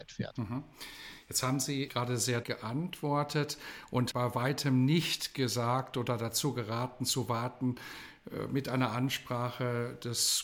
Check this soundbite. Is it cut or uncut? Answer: cut